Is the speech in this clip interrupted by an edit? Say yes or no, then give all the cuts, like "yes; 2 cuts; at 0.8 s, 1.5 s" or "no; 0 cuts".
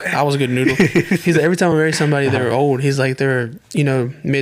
no; 0 cuts